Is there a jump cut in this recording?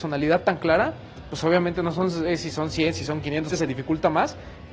yes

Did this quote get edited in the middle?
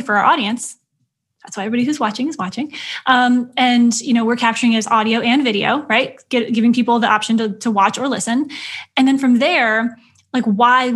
no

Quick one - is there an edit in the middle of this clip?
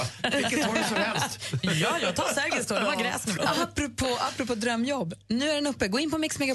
yes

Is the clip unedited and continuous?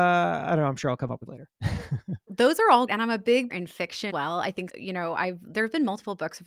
no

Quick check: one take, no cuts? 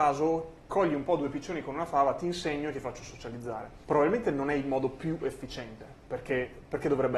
yes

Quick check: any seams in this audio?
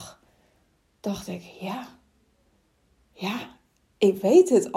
no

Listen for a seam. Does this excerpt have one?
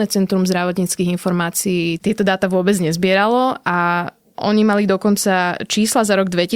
no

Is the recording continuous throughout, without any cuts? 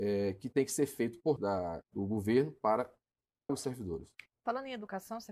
no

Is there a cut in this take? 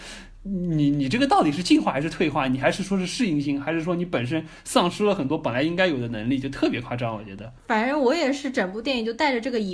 yes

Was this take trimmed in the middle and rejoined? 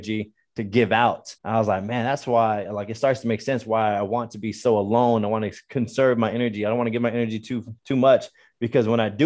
yes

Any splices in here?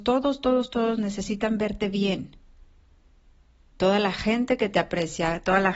no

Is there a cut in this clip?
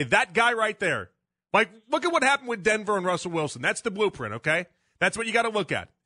no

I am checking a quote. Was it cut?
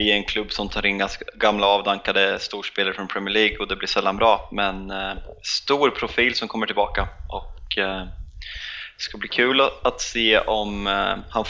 no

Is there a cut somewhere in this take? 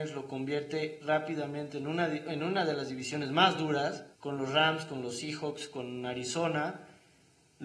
yes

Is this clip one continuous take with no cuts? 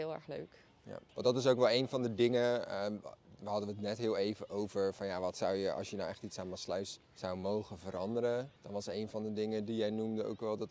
no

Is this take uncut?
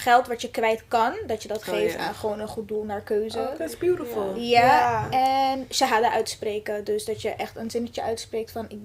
yes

